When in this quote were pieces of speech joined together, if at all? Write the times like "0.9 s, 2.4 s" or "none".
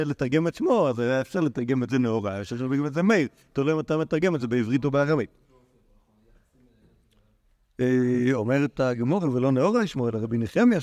none

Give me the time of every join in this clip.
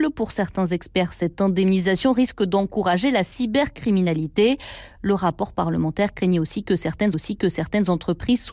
7.1 s

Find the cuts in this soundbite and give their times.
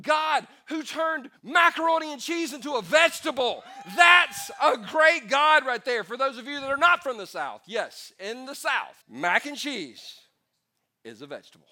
1.4 s, 9.0 s

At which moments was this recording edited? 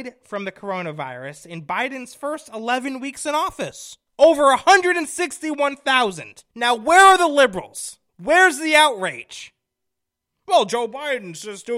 4.1 s, 6.5 s, 8.1 s

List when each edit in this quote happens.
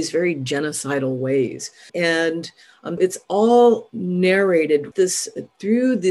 1.9 s, 3.0 s, 4.9 s

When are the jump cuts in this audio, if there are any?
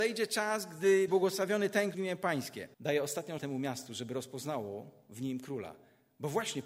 1.1 s, 1.9 s, 2.7 s, 3.4 s

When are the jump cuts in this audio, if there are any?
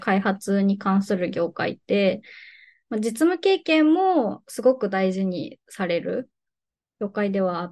none

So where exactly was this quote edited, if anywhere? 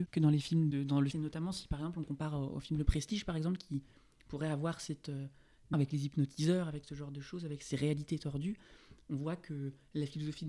1.1 s, 5.7 s

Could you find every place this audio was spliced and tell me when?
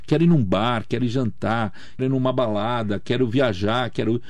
2.0 s

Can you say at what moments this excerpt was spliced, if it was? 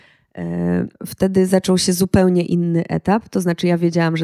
0.9 s

